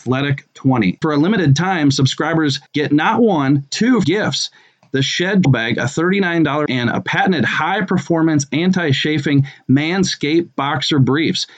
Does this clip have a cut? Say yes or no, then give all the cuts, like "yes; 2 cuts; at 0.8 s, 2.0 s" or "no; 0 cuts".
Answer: yes; 6 cuts; at 1.0 s, 2.7 s, 3.7 s, 4.0 s, 5.4 s, 6.7 s